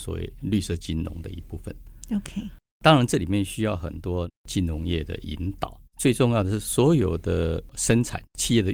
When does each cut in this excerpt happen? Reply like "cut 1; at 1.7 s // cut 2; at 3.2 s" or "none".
cut 1; at 5.9 s